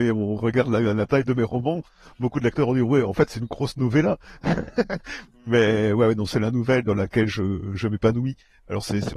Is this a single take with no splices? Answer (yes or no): yes